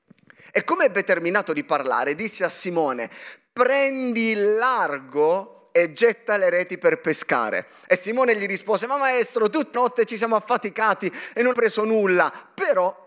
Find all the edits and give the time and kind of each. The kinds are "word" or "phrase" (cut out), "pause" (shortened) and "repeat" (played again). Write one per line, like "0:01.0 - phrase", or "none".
0:09.7 - word
0:11.5 - word